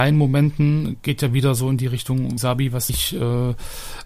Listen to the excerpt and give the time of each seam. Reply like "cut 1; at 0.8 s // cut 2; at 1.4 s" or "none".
cut 1; at 2.4 s // cut 2; at 2.9 s

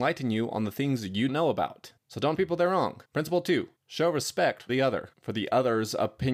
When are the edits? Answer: cut 1; at 1.3 s // cut 2; at 2.0 s // cut 3; at 2.4 s // cut 4; at 3.1 s // cut 5; at 3.8 s // cut 6; at 4.7 s // cut 7; at 5.1 s

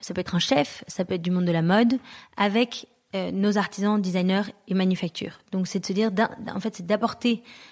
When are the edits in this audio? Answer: none

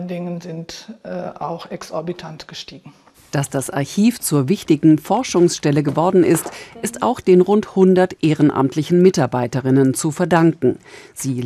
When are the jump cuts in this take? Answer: cut 1; at 3.1 s

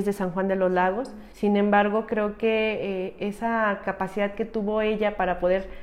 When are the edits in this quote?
cut 1; at 1.3 s

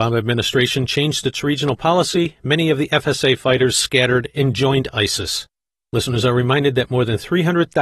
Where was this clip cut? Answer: none

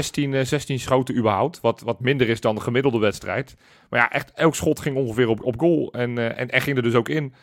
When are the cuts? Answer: none

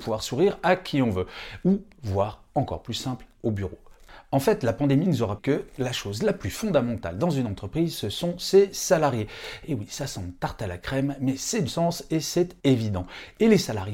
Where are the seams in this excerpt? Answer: cut 1; at 3.3 s // cut 2; at 5.4 s // cut 3; at 11.7 s // cut 4; at 12.6 s

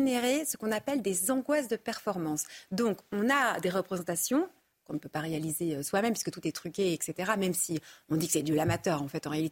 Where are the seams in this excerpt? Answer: none

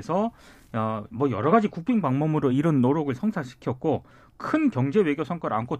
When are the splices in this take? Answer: none

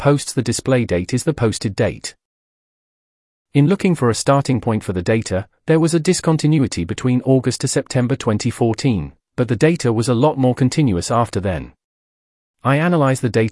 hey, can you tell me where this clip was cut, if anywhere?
none

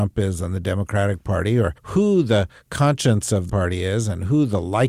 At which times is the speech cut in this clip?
cut 1; at 1.8 s // cut 2; at 3.5 s

